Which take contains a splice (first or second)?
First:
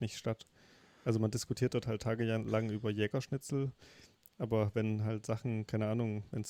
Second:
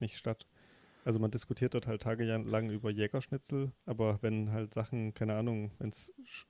second